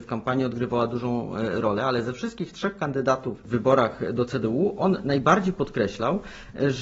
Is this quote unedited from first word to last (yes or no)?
yes